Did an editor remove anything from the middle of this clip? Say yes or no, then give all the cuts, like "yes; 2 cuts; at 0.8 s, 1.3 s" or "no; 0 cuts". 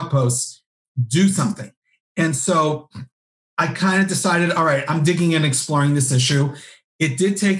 no; 0 cuts